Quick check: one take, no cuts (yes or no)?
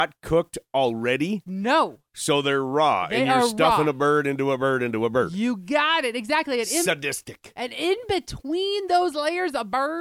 no